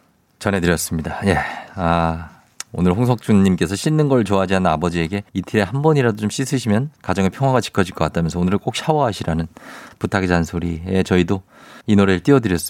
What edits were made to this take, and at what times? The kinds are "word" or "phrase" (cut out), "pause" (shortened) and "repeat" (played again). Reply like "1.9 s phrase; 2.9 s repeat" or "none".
2.7 s pause; 5.3 s pause; 7.0 s pause; 11.8 s pause